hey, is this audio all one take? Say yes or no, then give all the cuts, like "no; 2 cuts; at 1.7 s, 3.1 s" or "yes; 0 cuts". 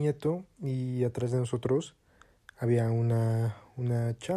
yes; 0 cuts